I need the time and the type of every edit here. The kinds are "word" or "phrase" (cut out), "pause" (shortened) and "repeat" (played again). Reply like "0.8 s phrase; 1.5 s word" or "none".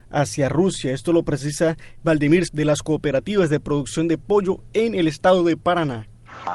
2.5 s word